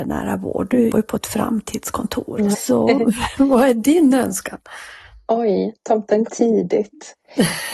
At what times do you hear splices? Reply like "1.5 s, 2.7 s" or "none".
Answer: 0.9 s, 2.5 s, 6.3 s